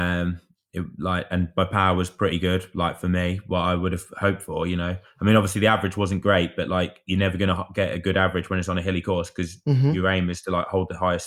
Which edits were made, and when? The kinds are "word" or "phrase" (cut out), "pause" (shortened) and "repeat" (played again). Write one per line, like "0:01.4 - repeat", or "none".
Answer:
none